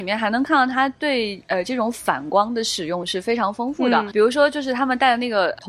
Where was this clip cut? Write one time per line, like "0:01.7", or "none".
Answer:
0:04.1